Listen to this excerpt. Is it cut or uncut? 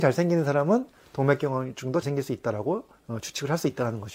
cut